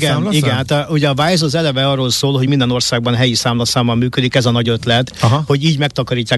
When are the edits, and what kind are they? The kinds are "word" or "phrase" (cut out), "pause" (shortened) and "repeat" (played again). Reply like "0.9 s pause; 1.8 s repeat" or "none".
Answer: none